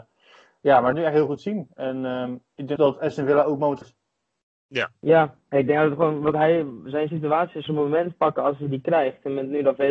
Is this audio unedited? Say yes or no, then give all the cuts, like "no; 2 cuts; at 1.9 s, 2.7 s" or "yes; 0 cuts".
no; 5 cuts; at 0.9 s, 2.8 s, 3.8 s, 5.4 s, 7.7 s